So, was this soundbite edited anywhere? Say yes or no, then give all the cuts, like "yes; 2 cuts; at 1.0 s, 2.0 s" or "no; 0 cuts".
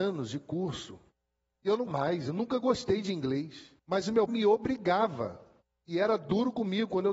yes; 3 cuts; at 1.9 s, 3.8 s, 4.3 s